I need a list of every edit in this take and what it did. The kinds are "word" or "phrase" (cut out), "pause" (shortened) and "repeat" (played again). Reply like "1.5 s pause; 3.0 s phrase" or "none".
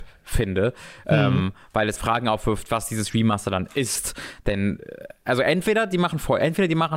2.0 s word